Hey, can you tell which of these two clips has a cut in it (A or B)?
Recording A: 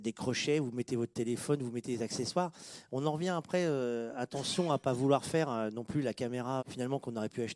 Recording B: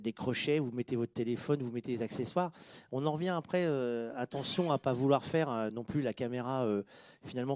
A